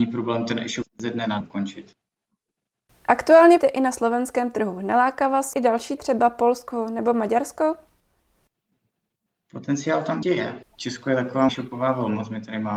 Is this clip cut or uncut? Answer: cut